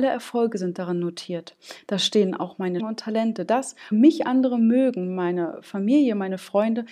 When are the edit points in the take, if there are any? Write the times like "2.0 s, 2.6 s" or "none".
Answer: 2.8 s, 3.9 s

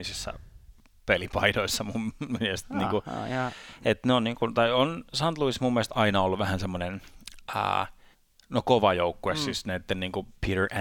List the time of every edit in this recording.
8.1 s

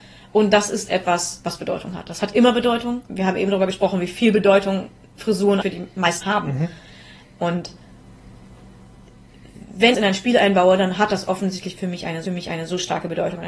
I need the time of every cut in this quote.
3.1 s, 5.6 s, 6.2 s, 9.9 s, 12.3 s

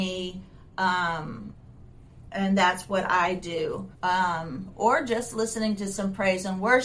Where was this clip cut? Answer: 3.9 s

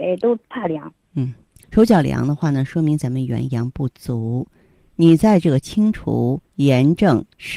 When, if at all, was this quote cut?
1.6 s, 6.4 s

